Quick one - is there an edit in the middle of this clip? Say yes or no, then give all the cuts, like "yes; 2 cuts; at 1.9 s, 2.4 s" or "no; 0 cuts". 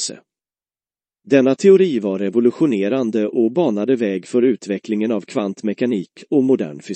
no; 0 cuts